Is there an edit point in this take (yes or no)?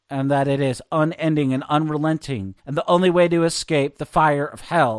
yes